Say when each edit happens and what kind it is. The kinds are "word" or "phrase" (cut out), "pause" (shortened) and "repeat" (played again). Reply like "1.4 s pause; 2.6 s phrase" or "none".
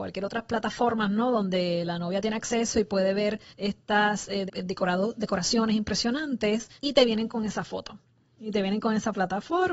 3.5 s pause; 4.5 s word; 6.8 s pause